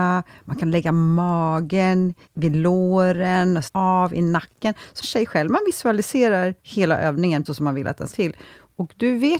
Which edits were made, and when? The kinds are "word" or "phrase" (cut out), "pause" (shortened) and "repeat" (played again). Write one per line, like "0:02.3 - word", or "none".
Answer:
0:02.2 - pause
0:03.7 - word
0:05.0 - phrase
0:06.6 - pause
0:07.4 - word
0:08.1 - phrase